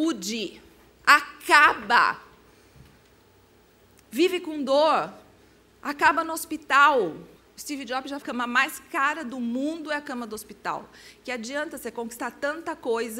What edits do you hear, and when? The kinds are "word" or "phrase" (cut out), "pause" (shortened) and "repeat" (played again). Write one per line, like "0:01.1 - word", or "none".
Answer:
0:05.6 - pause
0:07.4 - pause
0:08.2 - phrase